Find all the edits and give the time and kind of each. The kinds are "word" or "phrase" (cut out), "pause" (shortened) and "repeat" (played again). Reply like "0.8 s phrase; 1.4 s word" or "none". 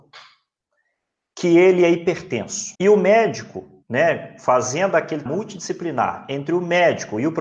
2.7 s pause; 3.8 s pause; 5.3 s word